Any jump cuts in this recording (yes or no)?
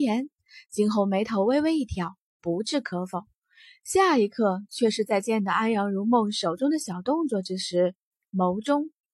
no